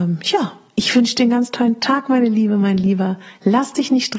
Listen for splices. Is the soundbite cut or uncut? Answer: uncut